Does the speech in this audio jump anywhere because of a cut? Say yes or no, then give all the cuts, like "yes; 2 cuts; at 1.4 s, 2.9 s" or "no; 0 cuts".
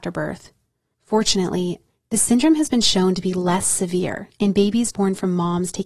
no; 0 cuts